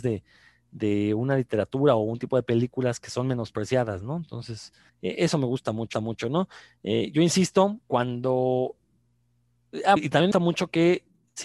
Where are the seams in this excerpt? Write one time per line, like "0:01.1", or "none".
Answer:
0:04.9
0:05.9
0:07.8
0:10.0
0:10.3